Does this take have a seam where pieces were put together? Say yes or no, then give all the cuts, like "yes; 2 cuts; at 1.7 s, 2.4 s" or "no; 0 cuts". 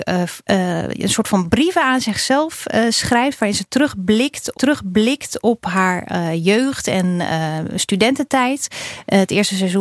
yes; 1 cut; at 4.5 s